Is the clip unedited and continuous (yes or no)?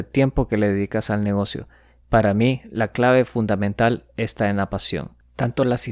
yes